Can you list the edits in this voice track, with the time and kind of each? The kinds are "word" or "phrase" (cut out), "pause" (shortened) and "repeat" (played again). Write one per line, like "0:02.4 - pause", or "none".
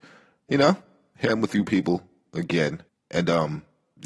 0:01.3 - word
0:02.9 - pause